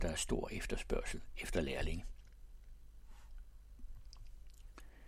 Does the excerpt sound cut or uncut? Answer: uncut